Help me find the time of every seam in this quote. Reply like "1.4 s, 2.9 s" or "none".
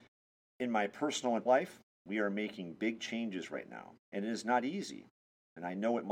1.5 s, 4.0 s